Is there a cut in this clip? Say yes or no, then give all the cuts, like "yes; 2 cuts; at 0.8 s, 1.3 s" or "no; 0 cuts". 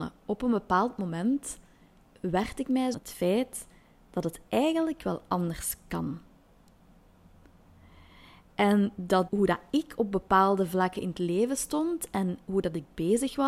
yes; 2 cuts; at 2.9 s, 9.3 s